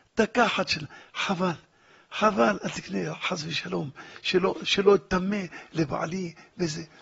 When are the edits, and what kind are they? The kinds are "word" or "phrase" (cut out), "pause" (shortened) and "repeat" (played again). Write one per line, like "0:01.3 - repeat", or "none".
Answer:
none